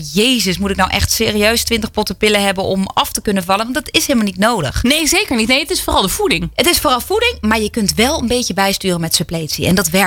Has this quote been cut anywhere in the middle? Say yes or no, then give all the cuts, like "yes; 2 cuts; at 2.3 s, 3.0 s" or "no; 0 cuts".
no; 0 cuts